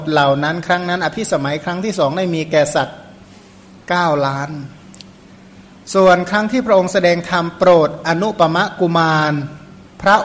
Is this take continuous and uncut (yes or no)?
yes